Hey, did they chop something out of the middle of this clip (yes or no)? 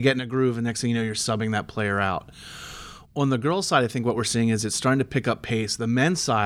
no